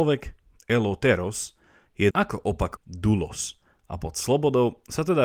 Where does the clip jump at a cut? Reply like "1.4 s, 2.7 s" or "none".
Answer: 2.1 s, 2.8 s